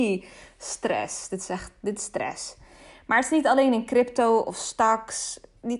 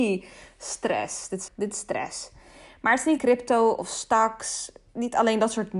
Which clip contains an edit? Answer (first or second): second